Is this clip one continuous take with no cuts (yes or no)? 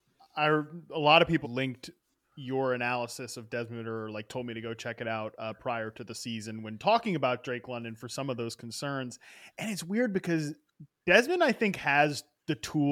no